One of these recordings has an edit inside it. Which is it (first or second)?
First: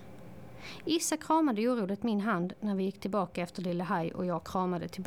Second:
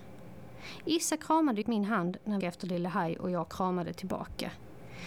second